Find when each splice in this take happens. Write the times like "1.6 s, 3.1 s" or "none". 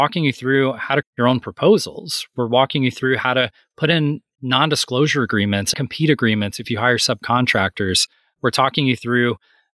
1.0 s, 5.7 s